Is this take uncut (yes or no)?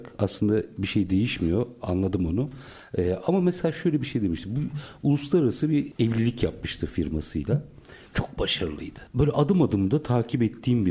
no